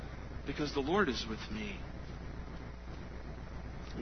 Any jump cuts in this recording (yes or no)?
no